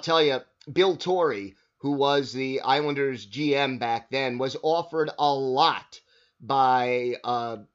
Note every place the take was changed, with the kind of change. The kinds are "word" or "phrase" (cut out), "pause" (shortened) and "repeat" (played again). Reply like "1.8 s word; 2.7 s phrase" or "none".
none